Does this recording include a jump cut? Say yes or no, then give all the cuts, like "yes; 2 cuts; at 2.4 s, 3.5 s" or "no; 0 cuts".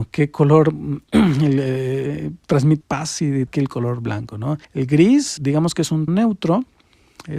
yes; 6 cuts; at 1.0 s, 2.8 s, 3.5 s, 4.6 s, 5.4 s, 6.1 s